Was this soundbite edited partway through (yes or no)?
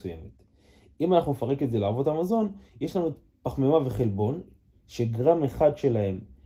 no